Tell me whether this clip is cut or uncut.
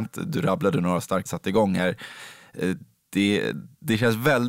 cut